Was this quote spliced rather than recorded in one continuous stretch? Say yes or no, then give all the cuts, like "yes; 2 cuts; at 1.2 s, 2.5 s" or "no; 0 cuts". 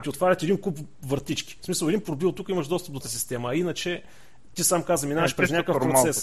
yes; 2 cuts; at 2.0 s, 3.0 s